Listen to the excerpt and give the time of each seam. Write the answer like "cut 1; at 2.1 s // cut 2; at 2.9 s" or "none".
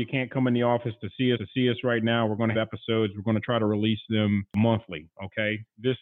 cut 1; at 1.3 s // cut 2; at 2.5 s